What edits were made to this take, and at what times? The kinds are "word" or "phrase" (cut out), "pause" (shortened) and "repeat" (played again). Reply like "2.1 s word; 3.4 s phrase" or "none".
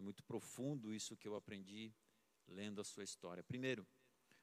none